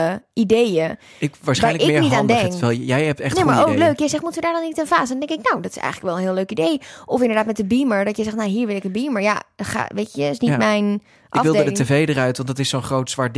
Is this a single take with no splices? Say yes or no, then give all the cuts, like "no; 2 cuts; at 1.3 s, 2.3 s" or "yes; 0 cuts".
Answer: yes; 0 cuts